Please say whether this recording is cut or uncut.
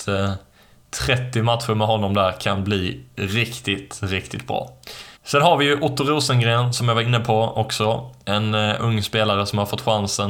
cut